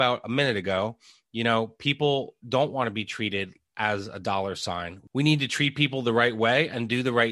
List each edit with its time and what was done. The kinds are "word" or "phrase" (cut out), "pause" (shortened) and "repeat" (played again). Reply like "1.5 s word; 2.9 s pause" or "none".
none